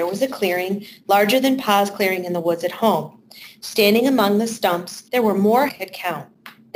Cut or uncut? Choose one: cut